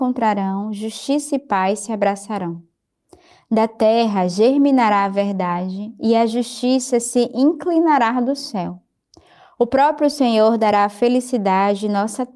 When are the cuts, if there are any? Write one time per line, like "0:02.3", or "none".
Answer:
none